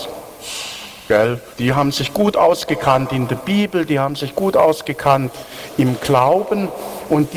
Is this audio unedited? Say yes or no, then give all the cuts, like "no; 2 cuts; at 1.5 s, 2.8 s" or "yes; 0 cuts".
no; 1 cut; at 1.5 s